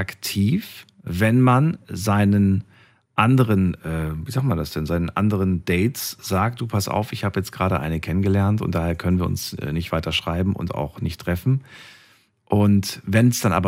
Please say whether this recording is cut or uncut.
uncut